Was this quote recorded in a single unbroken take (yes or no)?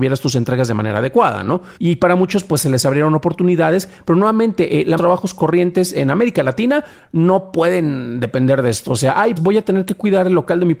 no